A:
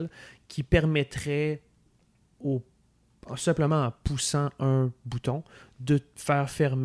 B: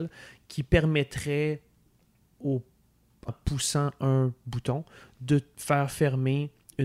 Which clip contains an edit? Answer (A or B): B